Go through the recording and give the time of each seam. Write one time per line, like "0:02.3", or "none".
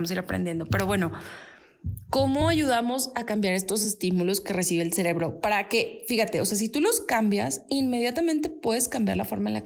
none